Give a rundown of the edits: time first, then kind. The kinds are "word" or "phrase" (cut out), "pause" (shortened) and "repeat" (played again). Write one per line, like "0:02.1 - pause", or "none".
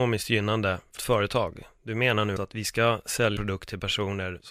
0:01.0 - word
0:02.4 - word
0:03.4 - word